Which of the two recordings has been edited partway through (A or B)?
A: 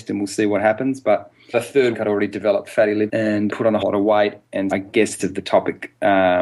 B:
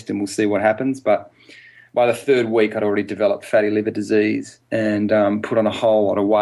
A